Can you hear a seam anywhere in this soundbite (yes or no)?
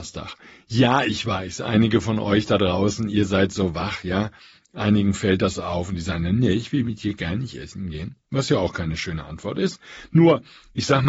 no